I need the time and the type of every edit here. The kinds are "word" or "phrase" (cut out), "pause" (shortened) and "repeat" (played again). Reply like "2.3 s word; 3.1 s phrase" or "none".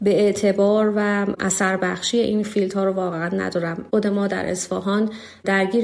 none